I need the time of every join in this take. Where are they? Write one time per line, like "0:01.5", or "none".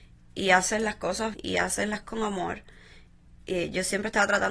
0:01.3
0:02.0